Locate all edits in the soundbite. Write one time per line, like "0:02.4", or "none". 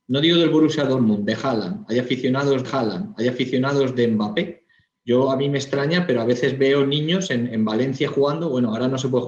0:02.6